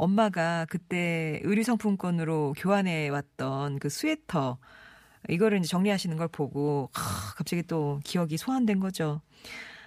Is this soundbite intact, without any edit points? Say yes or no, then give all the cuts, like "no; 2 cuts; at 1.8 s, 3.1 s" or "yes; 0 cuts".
yes; 0 cuts